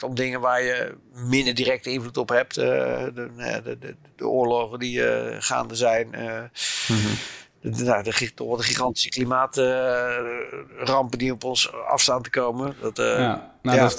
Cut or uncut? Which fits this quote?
uncut